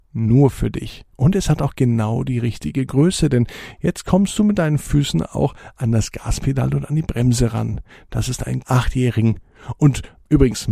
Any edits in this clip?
yes; 1 cut; at 8.6 s

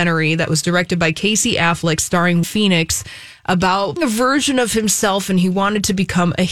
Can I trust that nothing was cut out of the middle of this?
no; 2 cuts; at 2.4 s, 4.0 s

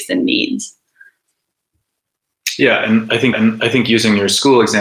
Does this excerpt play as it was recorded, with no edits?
no; 1 cut; at 3.3 s

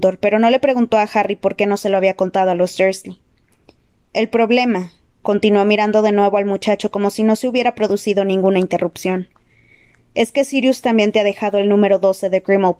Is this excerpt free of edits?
yes; 0 cuts

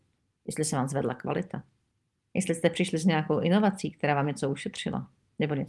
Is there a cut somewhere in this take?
no; 0 cuts

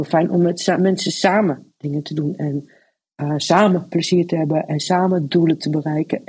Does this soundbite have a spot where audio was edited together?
no; 0 cuts

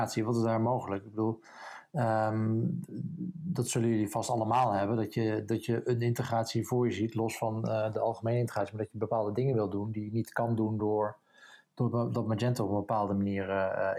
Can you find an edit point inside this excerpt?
no; 0 cuts

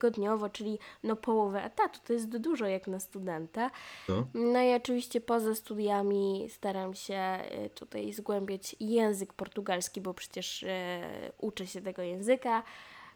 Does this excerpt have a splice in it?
no; 0 cuts

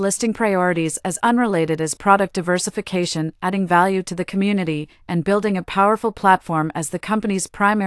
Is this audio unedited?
yes; 0 cuts

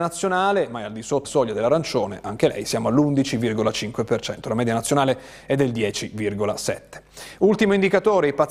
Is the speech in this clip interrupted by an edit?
yes; 1 cut; at 1.2 s

